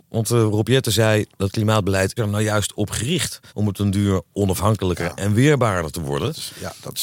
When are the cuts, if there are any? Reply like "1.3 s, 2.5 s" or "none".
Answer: 2.2 s, 3.5 s